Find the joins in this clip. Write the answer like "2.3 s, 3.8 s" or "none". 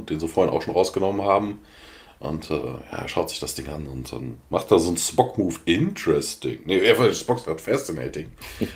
none

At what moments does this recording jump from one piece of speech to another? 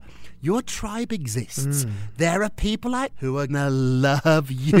3.1 s, 3.5 s

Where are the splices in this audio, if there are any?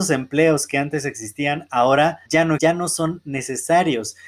2.3 s, 2.6 s

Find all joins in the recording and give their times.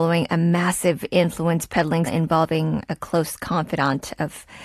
2.1 s

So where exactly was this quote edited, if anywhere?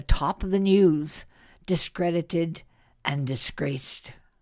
none

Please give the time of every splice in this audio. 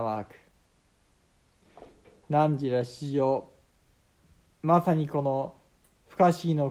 none

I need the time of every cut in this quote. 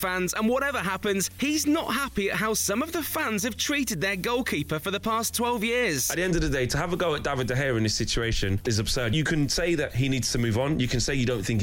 8.7 s

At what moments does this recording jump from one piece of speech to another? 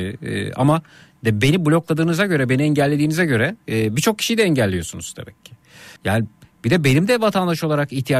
6.0 s

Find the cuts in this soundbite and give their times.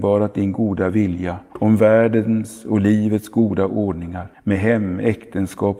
1.5 s, 4.3 s

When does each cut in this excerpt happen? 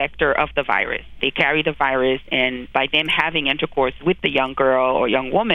none

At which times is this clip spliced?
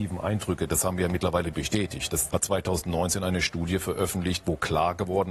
1.5 s, 2.3 s

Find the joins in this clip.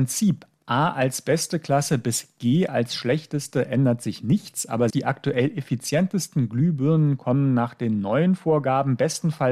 4.9 s

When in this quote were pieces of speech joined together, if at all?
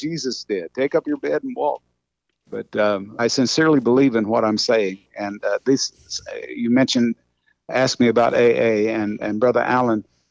3.2 s

